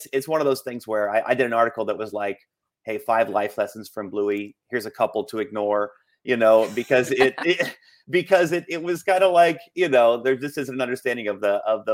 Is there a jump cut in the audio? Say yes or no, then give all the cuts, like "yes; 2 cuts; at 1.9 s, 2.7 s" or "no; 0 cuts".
no; 0 cuts